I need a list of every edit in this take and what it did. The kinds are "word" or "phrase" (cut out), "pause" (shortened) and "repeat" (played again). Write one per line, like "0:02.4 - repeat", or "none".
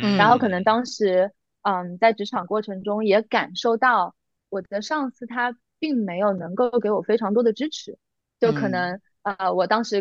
none